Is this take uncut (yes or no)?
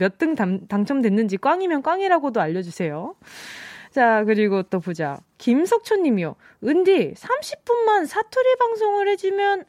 yes